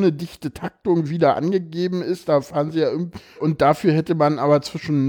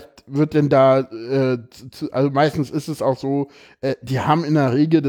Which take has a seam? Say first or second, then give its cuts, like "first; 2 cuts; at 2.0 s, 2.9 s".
first; 1 cut; at 3.4 s